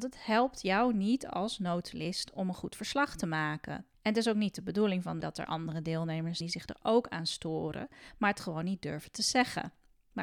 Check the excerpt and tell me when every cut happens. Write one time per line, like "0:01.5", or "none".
0:03.9
0:05.2
0:06.4